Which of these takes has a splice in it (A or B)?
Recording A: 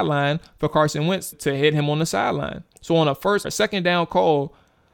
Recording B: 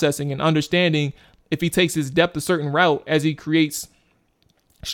A